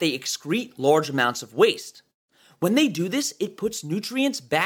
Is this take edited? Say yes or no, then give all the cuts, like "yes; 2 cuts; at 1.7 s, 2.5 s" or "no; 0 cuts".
no; 0 cuts